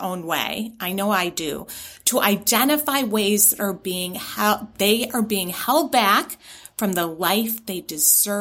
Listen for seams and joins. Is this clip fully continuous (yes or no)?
yes